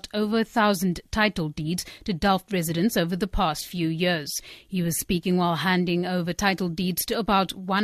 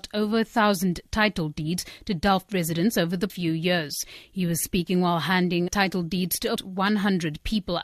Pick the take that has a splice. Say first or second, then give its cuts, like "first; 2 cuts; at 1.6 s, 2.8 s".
second; 3 cuts; at 3.3 s, 5.7 s, 6.6 s